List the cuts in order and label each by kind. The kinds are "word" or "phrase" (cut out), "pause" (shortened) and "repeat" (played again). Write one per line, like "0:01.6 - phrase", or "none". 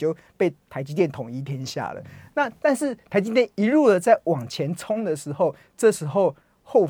0:03.5 - pause